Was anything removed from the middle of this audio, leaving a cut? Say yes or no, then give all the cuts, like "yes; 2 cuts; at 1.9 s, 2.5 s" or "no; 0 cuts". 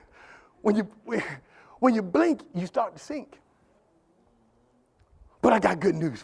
no; 0 cuts